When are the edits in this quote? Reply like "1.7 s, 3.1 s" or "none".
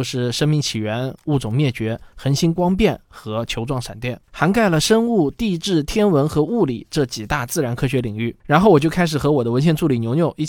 4.2 s, 8.4 s